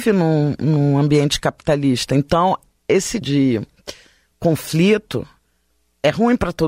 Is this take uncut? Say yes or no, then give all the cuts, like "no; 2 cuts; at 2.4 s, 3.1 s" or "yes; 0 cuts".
no; 1 cut; at 3.2 s